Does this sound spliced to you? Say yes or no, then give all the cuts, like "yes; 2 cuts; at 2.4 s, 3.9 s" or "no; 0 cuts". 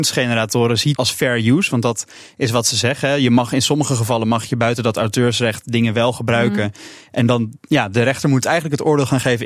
yes; 1 cut; at 1.0 s